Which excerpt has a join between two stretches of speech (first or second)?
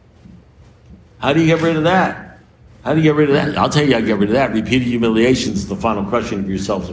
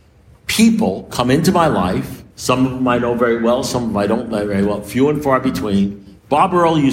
second